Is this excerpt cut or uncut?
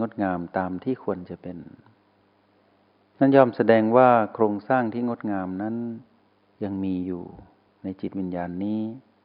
uncut